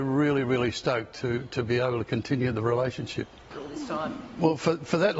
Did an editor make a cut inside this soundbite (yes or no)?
no